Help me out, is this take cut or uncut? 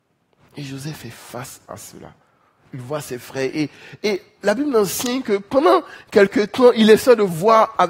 uncut